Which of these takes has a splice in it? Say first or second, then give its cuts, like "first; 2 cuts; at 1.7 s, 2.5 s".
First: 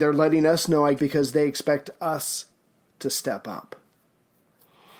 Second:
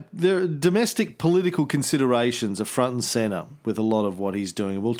first; 1 cut; at 1.0 s